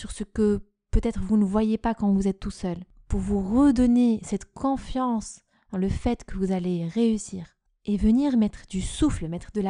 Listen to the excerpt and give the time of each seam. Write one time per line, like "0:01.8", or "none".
none